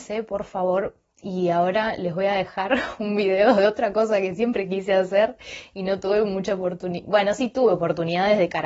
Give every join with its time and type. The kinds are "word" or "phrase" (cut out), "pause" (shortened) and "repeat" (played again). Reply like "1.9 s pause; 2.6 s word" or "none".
none